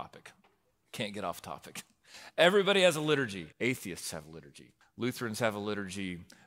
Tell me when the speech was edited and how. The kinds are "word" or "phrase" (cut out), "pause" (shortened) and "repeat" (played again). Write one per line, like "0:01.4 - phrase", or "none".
0:03.5 - pause
0:04.8 - pause